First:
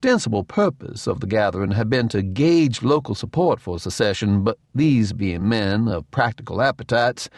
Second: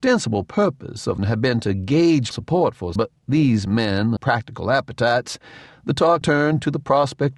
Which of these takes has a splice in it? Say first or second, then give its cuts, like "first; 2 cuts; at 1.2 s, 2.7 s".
second; 6 cuts; at 1.2 s, 2.3 s, 3.0 s, 3.7 s, 4.2 s, 6.2 s